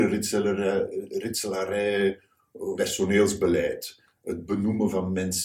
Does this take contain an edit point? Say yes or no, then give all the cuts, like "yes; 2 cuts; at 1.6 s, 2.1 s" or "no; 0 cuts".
yes; 1 cut; at 2.8 s